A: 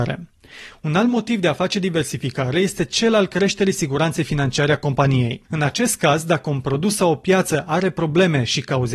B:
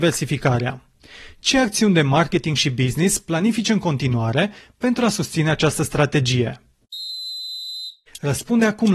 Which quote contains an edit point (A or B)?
A